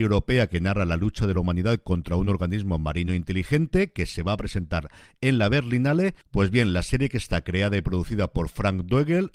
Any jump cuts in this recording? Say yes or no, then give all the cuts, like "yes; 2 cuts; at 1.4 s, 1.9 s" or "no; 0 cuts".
no; 0 cuts